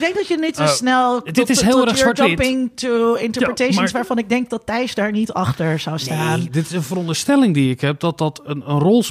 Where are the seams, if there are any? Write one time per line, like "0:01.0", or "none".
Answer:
none

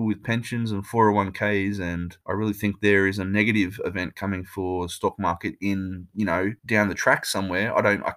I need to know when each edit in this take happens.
0:02.2
0:06.6

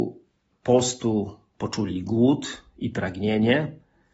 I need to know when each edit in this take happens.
none

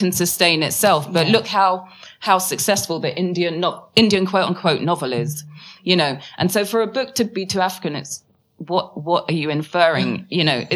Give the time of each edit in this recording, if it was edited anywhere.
none

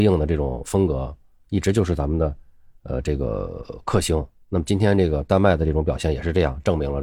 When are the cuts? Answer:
none

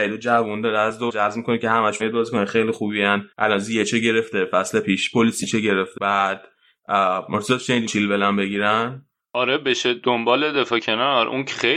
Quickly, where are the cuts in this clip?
0:01.1
0:02.0
0:03.3
0:06.0
0:07.9
0:09.2

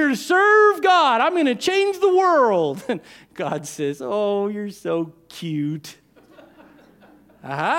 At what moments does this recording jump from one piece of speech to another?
none

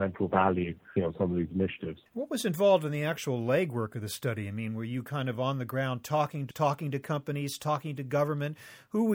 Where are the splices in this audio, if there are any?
0:01.0
0:02.1
0:06.5

